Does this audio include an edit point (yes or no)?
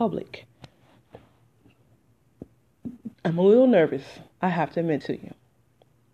yes